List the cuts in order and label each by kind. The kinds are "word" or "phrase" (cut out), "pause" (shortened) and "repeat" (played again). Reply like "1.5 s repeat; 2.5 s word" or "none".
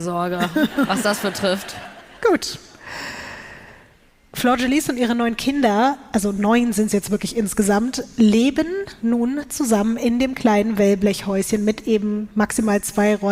none